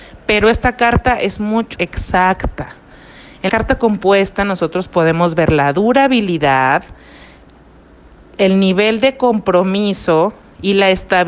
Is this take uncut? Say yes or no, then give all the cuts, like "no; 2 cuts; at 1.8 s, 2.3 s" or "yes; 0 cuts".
no; 2 cuts; at 1.8 s, 3.5 s